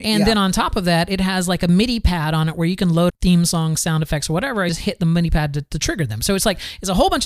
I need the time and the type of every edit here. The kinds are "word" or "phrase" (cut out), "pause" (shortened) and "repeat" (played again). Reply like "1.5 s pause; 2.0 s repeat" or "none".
3.1 s word; 4.7 s word

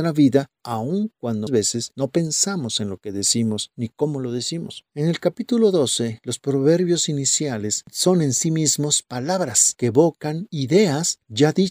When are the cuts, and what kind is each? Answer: 1.5 s word; 4.9 s pause

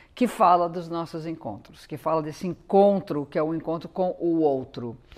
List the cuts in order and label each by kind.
none

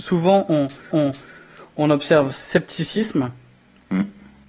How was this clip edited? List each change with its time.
0.9 s repeat; 2.3 s phrase

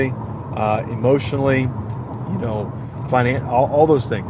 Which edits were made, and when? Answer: 3.1 s word

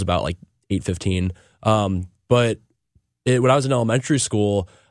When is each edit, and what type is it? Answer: none

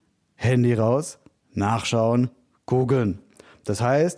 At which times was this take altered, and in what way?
none

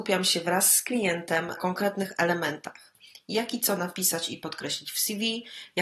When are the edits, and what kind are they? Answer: 1.6 s word

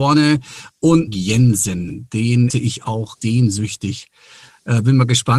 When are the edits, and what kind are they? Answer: 1.1 s phrase; 2.5 s word; 3.2 s word

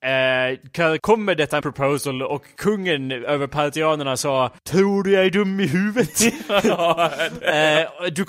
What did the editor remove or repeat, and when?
1.0 s word; 1.6 s word; 4.6 s pause

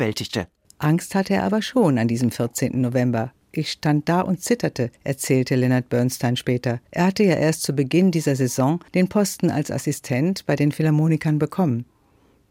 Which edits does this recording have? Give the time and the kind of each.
3.4 s pause; 5.0 s pause; 6.9 s pause; 8.9 s pause

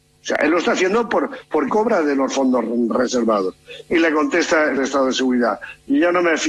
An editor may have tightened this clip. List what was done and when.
1.7 s word; 4.8 s word

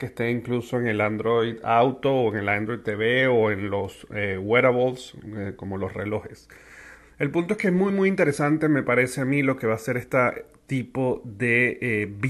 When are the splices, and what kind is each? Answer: none

